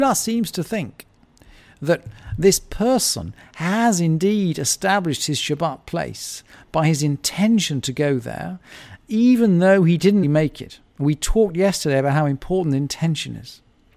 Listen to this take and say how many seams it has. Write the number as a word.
two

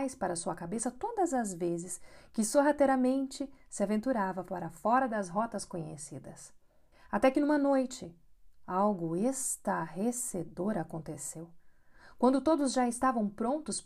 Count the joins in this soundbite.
one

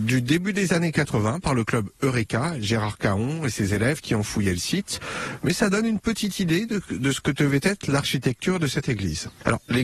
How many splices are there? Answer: zero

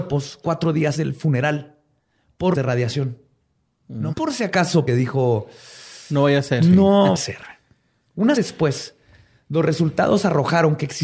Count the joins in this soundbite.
six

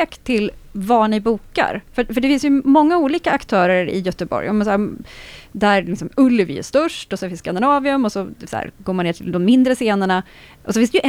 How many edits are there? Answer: zero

